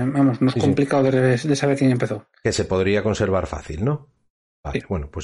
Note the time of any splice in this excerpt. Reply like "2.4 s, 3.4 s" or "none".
none